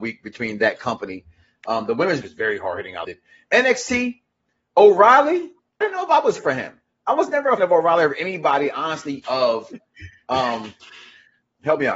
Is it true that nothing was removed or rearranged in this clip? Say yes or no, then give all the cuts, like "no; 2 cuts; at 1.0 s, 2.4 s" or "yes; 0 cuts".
no; 6 cuts; at 2.2 s, 3.0 s, 5.8 s, 6.4 s, 7.6 s, 9.2 s